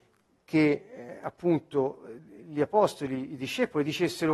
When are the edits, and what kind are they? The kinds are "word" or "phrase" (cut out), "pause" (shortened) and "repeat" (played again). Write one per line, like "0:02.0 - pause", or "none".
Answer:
none